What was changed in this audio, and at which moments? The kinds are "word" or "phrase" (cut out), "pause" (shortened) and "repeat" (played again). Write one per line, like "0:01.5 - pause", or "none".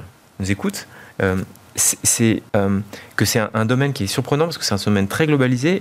0:02.5 - pause